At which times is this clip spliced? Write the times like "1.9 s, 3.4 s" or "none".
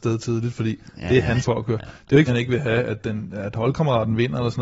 1.4 s, 2.3 s